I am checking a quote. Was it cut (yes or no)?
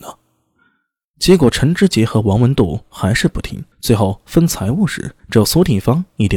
yes